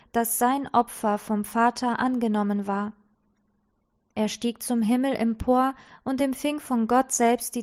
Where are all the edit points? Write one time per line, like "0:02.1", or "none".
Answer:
none